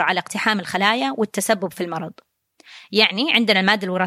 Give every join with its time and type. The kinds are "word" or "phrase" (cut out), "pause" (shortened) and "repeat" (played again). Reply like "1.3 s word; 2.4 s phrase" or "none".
none